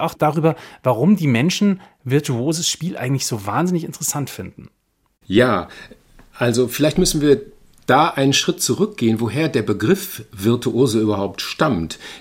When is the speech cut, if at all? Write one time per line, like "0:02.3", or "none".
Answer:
none